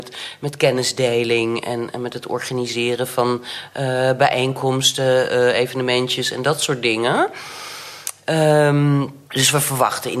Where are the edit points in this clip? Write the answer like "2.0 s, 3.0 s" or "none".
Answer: 9.3 s